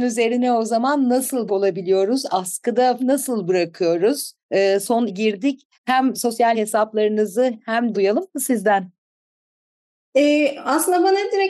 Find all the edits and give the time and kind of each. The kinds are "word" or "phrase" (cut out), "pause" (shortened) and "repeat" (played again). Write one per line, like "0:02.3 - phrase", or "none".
0:01.5 - word
0:03.0 - word
0:04.4 - pause
0:05.1 - phrase
0:05.7 - pause
0:06.5 - word
0:07.9 - phrase